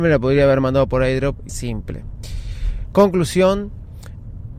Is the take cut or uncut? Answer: cut